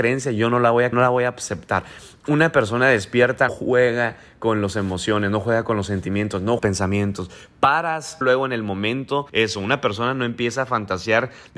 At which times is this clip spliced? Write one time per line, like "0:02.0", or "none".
0:00.9
0:03.5
0:06.6
0:08.2
0:09.3